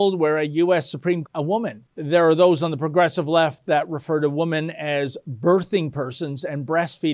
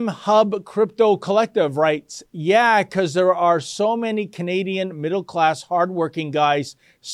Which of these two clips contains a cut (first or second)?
first